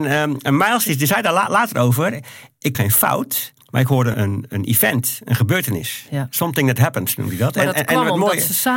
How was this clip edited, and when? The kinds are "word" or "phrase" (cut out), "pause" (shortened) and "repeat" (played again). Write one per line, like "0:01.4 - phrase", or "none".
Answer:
0:02.7 - word
0:03.6 - pause
0:04.1 - word